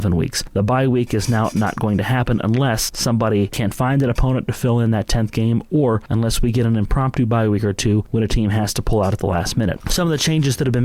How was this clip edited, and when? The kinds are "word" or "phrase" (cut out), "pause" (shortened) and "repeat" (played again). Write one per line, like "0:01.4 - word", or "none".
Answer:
none